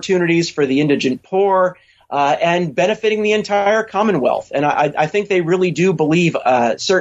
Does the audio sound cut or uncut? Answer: uncut